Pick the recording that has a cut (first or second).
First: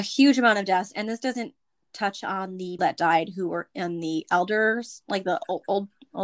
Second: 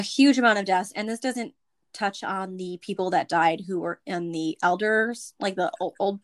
first